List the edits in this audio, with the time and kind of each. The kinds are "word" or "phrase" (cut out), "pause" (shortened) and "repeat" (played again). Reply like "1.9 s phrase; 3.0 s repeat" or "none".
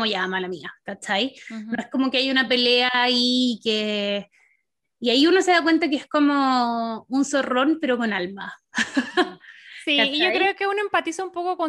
none